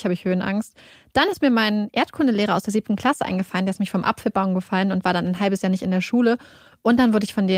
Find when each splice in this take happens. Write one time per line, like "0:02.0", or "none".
none